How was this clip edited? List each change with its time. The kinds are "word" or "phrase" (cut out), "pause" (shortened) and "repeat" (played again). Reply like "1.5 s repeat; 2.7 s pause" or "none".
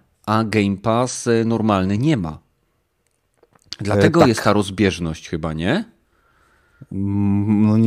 none